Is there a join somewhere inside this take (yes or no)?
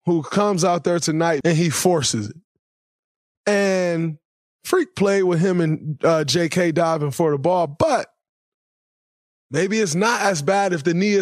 no